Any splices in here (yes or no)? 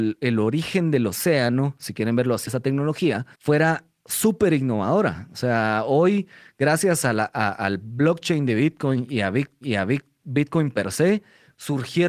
yes